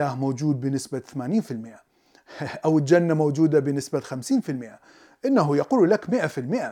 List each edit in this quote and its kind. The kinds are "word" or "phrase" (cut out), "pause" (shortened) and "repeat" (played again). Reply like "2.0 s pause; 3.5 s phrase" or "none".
none

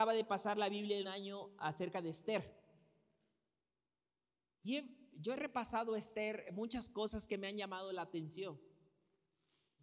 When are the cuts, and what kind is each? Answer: 1.0 s word

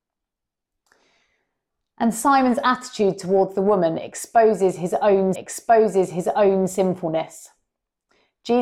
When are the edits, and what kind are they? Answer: 5.3 s repeat

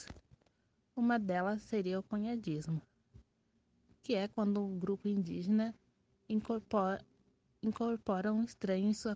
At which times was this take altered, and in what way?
none

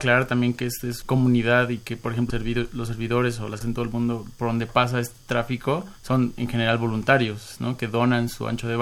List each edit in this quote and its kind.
1.0 s word; 2.3 s word; 3.6 s word; 6.0 s pause

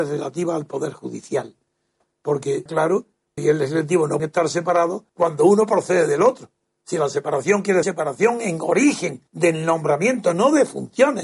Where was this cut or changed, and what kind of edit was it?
2.7 s word; 3.4 s phrase; 4.2 s word; 5.1 s pause; 7.8 s word; 9.3 s pause

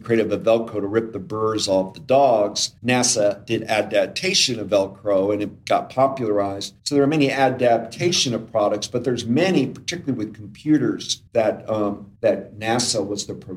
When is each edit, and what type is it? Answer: 2.8 s pause; 6.8 s pause; 11.3 s pause; 12.2 s pause

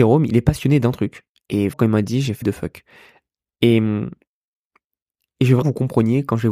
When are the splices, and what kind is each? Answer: 1.7 s word; 2.4 s word; 5.6 s word

